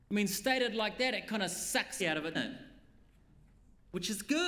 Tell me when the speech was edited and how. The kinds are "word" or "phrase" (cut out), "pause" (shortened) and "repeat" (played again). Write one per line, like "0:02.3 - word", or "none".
0:02.0 - phrase
0:02.3 - word